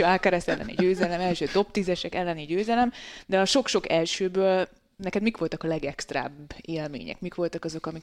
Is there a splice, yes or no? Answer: no